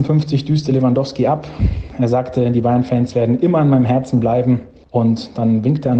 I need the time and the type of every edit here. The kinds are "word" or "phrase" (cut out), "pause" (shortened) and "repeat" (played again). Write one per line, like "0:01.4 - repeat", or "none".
none